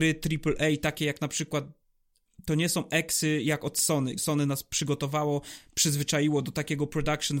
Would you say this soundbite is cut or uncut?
cut